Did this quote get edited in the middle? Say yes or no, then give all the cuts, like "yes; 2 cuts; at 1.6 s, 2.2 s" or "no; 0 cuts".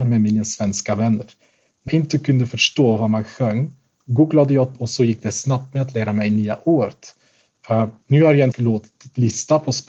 yes; 3 cuts; at 1.9 s, 4.7 s, 8.5 s